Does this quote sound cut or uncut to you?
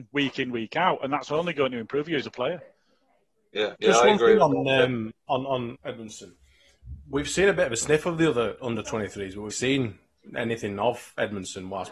cut